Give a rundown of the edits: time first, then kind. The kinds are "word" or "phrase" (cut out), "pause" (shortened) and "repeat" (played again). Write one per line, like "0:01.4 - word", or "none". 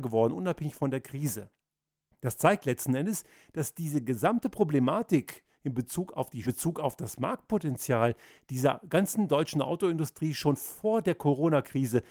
0:06.4 - phrase